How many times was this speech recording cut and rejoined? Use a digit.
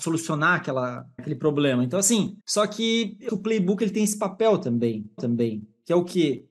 4